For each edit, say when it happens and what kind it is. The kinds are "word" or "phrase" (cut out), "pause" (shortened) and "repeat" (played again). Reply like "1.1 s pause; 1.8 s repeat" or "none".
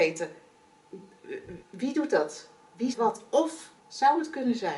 1.6 s pause; 2.9 s word; 3.8 s phrase